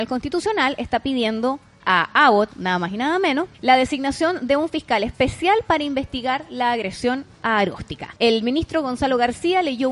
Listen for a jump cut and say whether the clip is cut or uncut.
cut